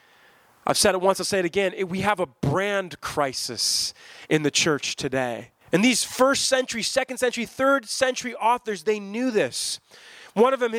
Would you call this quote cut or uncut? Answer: cut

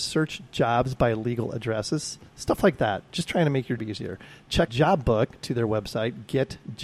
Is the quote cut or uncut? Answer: cut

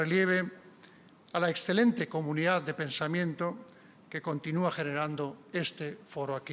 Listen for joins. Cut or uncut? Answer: uncut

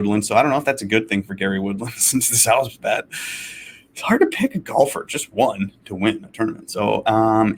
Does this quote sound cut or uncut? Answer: uncut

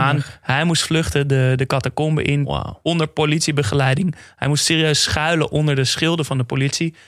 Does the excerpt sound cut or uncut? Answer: uncut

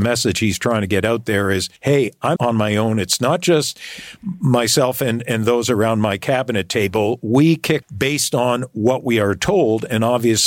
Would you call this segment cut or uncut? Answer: cut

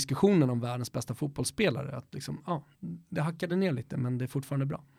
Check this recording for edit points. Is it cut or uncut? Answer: uncut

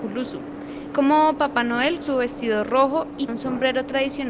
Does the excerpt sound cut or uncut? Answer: cut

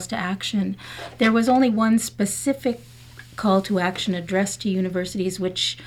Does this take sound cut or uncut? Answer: uncut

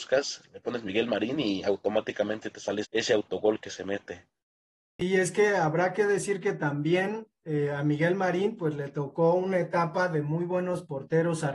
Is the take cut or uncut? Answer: cut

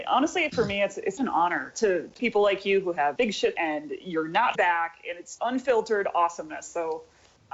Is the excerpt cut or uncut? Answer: cut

